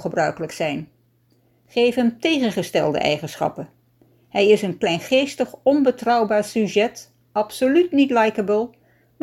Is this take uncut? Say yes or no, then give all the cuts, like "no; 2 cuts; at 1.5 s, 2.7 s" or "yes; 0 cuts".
yes; 0 cuts